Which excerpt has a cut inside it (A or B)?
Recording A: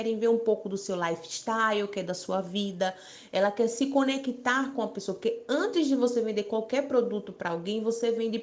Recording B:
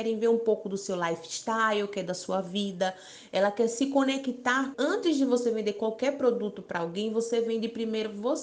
B